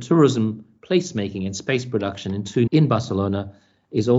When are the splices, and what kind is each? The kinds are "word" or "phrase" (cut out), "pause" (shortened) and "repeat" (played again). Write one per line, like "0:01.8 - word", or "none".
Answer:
0:02.7 - word